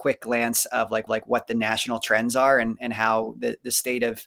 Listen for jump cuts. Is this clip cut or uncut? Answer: cut